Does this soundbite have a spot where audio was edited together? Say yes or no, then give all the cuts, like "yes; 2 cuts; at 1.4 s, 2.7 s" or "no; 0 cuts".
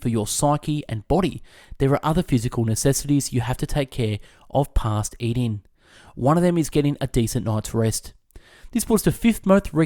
no; 0 cuts